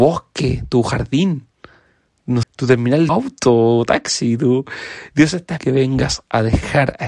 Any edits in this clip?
yes; 3 cuts; at 2.4 s, 3.1 s, 5.6 s

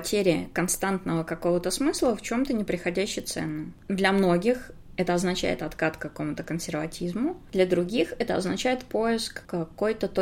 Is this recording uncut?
yes; 0 cuts

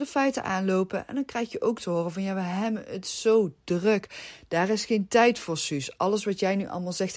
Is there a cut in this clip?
no; 0 cuts

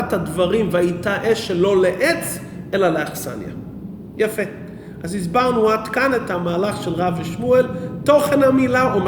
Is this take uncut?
yes; 0 cuts

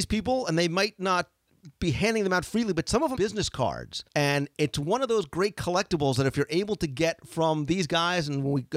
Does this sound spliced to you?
yes; 2 cuts; at 3.1 s, 4.1 s

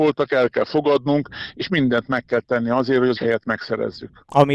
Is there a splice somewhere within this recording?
yes; 1 cut; at 3.2 s

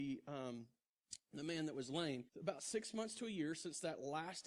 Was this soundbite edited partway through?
yes; 1 cut; at 2.3 s

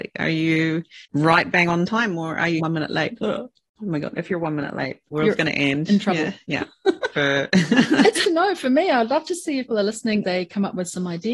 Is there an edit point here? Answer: yes; 6 cuts; at 1.0 s, 2.6 s, 7.1 s, 8.2 s, 9.7 s, 10.2 s

